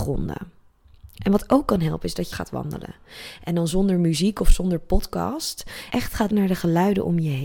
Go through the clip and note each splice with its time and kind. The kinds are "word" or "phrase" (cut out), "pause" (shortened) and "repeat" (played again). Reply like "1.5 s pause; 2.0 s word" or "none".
2.3 s phrase; 6.3 s word